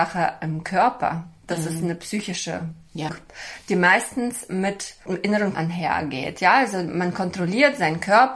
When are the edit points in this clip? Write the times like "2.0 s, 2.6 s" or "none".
3.1 s, 5.5 s